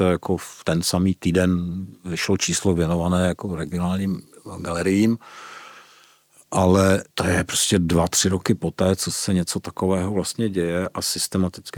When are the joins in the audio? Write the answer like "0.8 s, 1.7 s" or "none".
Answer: 2.0 s, 7.1 s